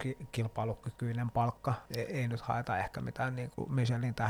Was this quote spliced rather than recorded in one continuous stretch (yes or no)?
yes